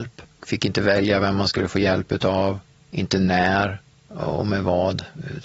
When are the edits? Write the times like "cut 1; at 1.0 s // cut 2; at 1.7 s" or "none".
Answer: none